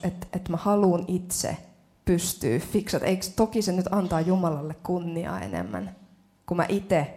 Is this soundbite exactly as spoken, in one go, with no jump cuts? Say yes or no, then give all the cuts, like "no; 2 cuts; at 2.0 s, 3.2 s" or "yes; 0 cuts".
yes; 0 cuts